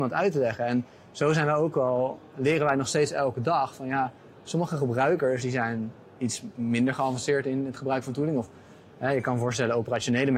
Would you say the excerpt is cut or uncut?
uncut